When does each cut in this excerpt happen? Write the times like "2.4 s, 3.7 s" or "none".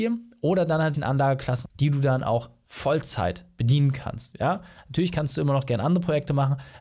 0.9 s, 1.6 s